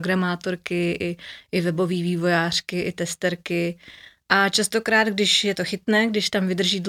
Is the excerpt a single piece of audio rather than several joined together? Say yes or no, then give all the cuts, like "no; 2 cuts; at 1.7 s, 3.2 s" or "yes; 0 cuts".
yes; 0 cuts